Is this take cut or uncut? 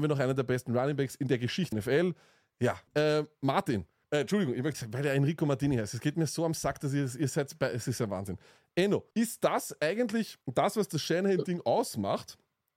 cut